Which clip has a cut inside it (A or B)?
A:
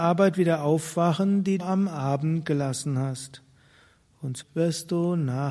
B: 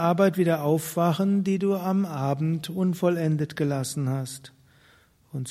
A